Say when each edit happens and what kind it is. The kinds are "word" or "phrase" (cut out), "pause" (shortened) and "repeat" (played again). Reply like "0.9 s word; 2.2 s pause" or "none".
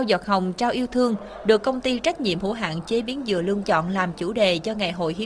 3.6 s word